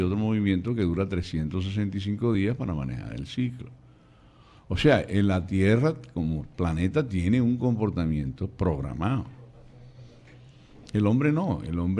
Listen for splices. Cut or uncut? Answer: uncut